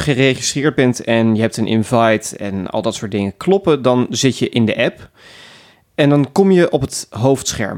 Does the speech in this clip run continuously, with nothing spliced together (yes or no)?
yes